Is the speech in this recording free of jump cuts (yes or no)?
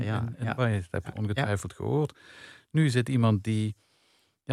yes